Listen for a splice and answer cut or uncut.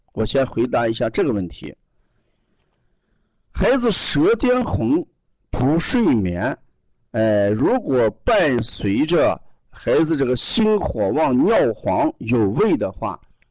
uncut